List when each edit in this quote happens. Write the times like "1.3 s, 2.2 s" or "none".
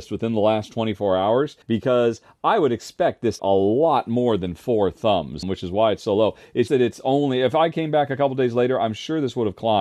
1.6 s, 3.4 s, 5.4 s, 6.7 s